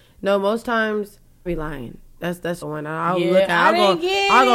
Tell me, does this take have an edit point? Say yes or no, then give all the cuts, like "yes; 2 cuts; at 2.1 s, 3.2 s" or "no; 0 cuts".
yes; 2 cuts; at 1.5 s, 2.6 s